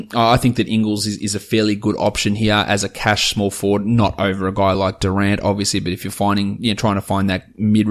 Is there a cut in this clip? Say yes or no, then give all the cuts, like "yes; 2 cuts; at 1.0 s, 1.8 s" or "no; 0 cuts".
no; 0 cuts